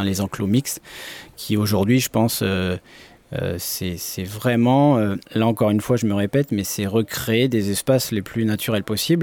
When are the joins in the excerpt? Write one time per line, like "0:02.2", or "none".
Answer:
0:05.3